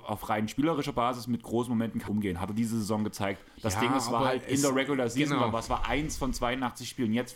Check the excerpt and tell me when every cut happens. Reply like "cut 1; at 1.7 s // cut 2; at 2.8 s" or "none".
cut 1; at 2.1 s